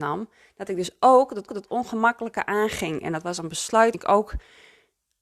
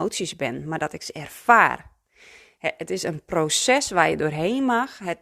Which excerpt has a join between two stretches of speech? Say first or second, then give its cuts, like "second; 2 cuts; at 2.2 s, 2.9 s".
first; 2 cuts; at 1.5 s, 3.9 s